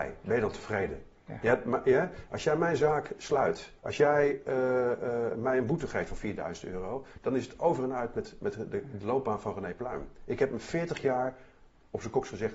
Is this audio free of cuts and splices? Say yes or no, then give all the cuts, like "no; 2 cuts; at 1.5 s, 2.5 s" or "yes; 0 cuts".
no; 1 cut; at 3.8 s